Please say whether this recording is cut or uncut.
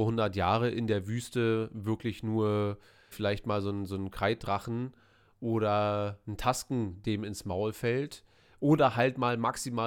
cut